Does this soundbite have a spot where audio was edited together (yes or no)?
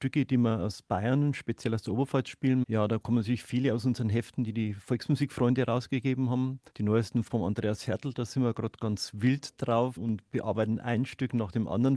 yes